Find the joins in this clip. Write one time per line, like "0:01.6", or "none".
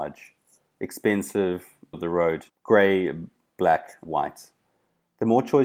0:01.9
0:02.5
0:04.1